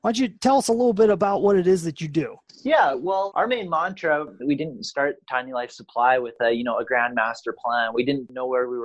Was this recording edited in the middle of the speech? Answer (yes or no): no